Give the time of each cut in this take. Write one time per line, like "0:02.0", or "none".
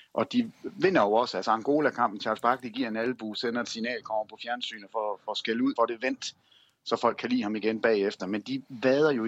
0:05.8